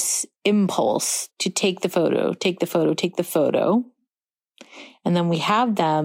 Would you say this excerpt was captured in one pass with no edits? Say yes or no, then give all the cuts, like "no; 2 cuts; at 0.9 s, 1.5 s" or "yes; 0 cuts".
no; 1 cut; at 1.3 s